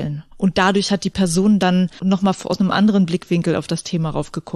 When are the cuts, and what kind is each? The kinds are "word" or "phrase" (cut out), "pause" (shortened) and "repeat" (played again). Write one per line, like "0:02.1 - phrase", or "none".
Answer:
none